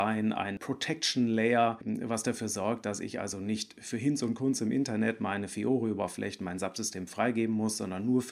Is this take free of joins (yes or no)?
yes